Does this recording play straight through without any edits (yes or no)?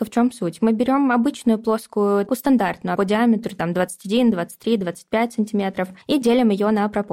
no